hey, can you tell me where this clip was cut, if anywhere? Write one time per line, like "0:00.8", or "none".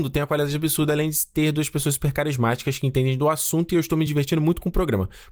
none